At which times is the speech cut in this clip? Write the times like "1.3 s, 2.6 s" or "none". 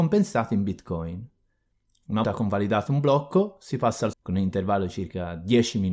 2.2 s, 4.1 s